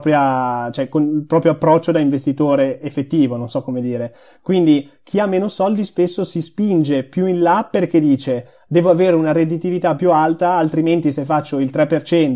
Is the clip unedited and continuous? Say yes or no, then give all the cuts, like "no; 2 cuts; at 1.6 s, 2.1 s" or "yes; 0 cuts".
yes; 0 cuts